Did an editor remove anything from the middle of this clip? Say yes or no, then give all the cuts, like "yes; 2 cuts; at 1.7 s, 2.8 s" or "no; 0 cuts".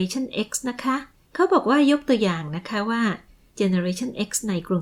no; 0 cuts